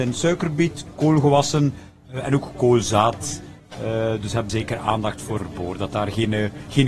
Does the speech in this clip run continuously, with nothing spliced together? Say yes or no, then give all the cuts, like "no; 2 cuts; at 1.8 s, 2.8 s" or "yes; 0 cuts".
no; 2 cuts; at 4.5 s, 5.4 s